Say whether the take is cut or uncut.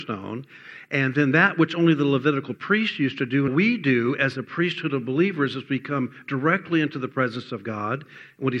cut